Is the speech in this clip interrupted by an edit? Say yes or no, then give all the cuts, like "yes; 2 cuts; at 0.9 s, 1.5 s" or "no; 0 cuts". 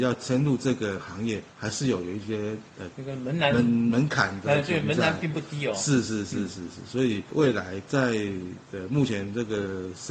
no; 0 cuts